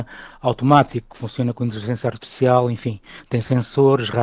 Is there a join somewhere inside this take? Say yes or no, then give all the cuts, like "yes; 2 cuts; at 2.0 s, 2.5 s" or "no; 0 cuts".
no; 0 cuts